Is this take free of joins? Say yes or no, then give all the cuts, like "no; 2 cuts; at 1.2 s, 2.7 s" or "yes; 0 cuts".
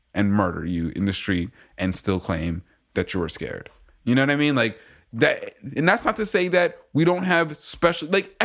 yes; 0 cuts